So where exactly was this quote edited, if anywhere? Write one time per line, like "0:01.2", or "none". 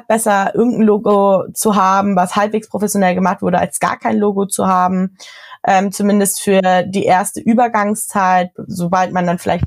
none